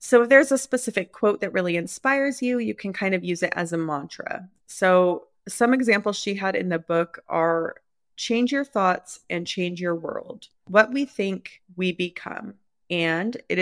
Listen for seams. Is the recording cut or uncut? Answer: uncut